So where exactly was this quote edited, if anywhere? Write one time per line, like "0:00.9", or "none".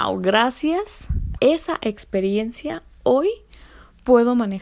0:01.4